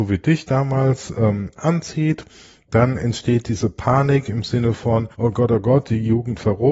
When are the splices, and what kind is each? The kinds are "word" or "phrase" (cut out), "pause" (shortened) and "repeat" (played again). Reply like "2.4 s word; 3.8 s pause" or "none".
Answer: 5.1 s pause